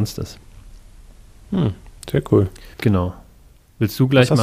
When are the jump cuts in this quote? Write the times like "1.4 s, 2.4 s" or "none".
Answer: 2.7 s